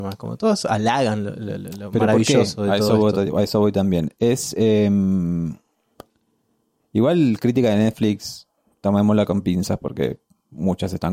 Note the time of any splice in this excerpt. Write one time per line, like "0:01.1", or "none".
none